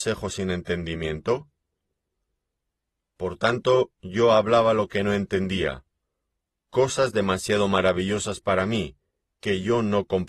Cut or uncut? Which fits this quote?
uncut